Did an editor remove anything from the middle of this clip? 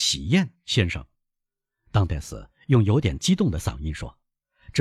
no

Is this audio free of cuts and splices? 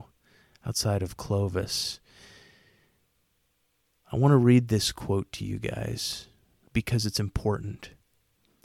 no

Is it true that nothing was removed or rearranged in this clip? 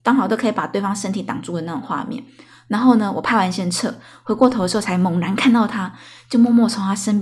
yes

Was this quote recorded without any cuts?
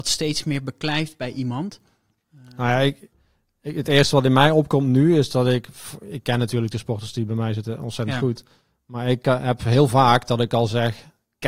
yes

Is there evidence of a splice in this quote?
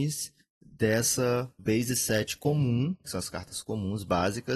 yes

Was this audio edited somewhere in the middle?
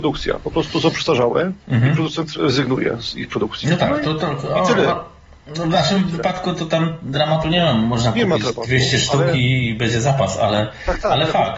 yes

